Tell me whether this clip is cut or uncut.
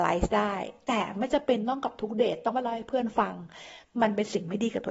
uncut